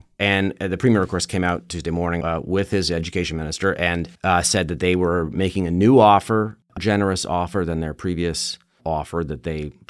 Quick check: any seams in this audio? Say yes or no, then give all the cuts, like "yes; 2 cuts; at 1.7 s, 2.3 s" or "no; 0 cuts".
yes; 3 cuts; at 2.2 s, 4.2 s, 6.8 s